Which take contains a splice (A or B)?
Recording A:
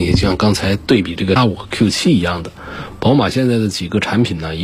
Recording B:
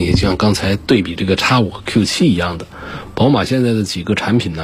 A